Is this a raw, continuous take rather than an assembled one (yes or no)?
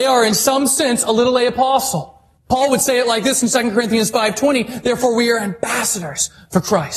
no